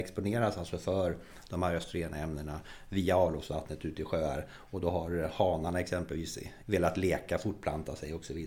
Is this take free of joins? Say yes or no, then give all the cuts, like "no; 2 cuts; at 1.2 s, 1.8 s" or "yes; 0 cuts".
no; 1 cut; at 6.6 s